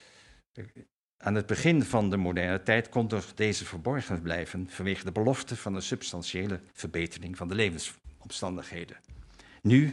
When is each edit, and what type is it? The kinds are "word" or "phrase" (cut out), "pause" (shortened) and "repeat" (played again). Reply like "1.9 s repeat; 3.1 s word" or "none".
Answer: 6.7 s pause